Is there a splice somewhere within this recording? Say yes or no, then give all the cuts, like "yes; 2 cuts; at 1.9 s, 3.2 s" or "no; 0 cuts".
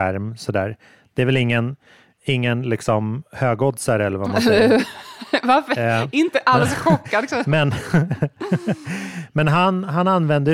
no; 0 cuts